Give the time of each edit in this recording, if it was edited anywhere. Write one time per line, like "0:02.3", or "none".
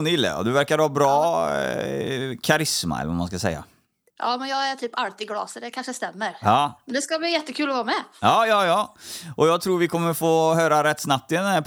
none